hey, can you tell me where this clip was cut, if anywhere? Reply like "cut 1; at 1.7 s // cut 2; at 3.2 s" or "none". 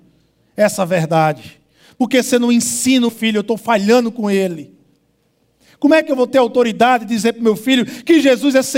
cut 1; at 3.1 s